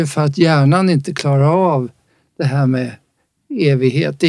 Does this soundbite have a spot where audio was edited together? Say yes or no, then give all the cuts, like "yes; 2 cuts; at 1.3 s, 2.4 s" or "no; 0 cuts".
no; 0 cuts